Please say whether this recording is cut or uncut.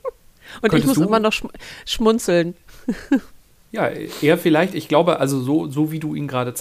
uncut